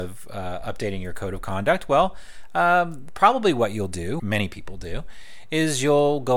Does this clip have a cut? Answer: yes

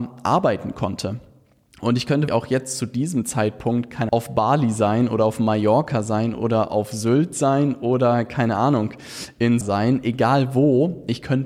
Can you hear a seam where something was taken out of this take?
yes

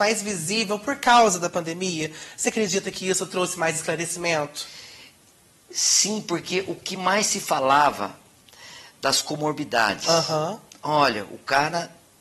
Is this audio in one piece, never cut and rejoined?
yes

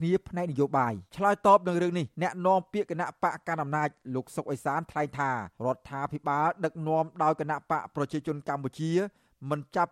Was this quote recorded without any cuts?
no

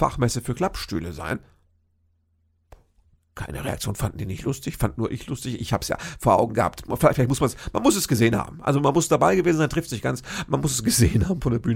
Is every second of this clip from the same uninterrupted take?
yes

